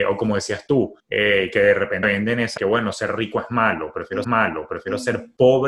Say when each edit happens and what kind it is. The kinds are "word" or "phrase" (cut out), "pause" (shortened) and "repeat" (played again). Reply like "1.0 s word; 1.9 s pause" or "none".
1.0 s pause; 2.0 s word; 2.6 s phrase; 4.2 s repeat